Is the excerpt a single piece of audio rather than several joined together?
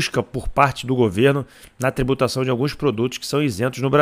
yes; 0 cuts

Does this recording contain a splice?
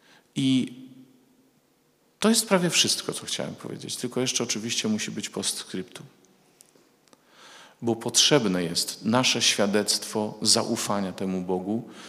no; 0 cuts

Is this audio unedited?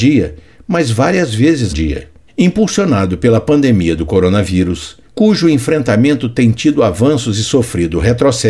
no; 3 cuts; at 1.7 s, 2.3 s, 5.0 s

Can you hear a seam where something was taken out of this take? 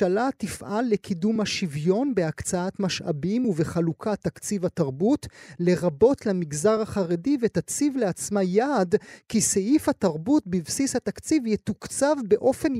no; 0 cuts

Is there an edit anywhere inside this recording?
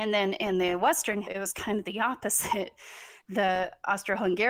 yes; 1 cut; at 1.2 s

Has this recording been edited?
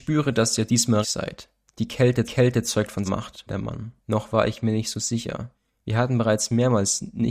yes; 5 cuts; at 1.0 s, 2.2 s, 3.0 s, 3.5 s, 4.0 s

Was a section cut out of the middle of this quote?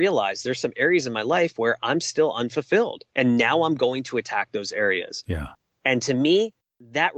no; 0 cuts

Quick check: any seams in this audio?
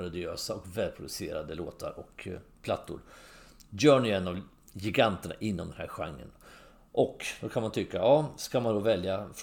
no; 0 cuts

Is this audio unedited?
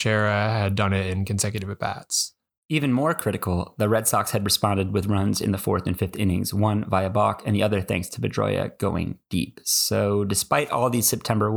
yes; 0 cuts

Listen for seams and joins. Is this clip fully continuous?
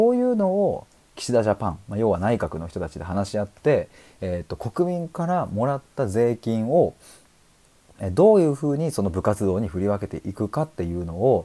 yes; 0 cuts

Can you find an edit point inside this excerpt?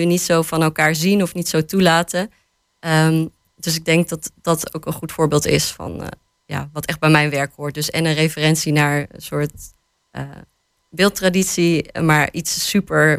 no; 0 cuts

